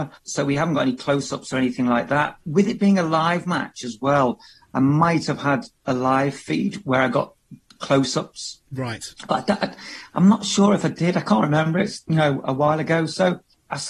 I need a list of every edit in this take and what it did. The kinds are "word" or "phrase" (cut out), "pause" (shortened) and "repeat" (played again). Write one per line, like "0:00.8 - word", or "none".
none